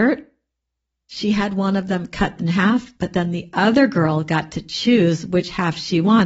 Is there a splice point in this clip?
yes; 2 cuts; at 2.4 s, 2.9 s

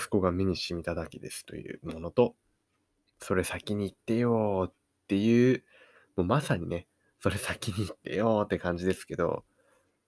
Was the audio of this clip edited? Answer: no; 0 cuts

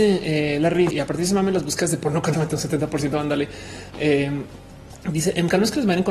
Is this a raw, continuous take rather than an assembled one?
no; 2 cuts; at 0.9 s, 2.3 s

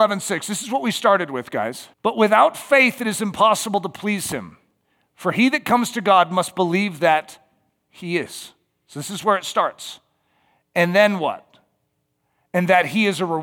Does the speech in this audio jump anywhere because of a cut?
yes; 1 cut; at 1.9 s

